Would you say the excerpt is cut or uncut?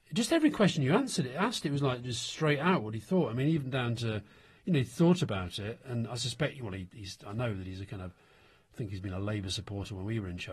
uncut